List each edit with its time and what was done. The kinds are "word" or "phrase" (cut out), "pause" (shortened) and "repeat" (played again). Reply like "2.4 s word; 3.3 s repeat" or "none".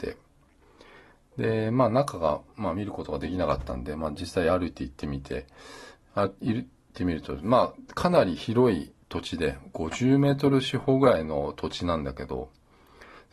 9.0 s pause